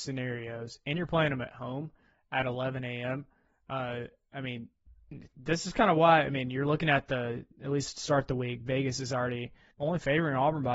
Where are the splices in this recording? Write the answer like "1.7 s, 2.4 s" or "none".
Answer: 9.7 s